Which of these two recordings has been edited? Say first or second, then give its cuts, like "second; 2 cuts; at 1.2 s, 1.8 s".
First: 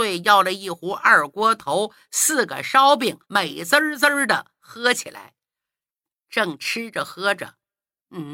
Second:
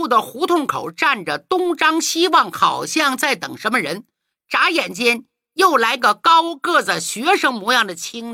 first; 1 cut; at 3.2 s